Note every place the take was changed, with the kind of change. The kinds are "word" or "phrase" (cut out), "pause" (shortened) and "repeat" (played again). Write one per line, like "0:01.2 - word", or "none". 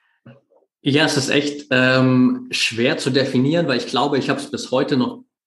none